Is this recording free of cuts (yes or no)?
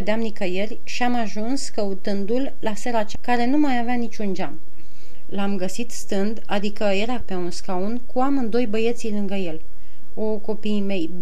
no